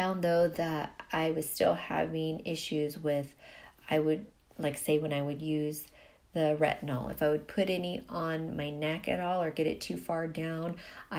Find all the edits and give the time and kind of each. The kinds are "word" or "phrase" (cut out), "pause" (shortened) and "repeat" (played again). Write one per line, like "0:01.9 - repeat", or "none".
none